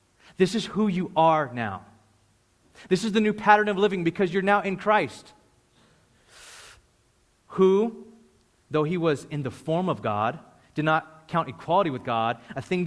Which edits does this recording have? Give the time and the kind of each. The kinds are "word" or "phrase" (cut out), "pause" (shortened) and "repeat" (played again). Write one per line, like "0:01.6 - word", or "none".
none